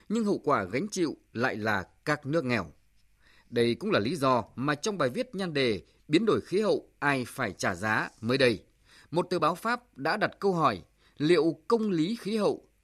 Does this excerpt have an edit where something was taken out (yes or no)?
no